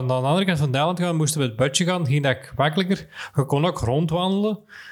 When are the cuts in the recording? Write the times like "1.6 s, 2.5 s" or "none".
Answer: none